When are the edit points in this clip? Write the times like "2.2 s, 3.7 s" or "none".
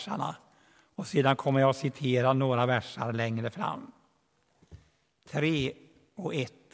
none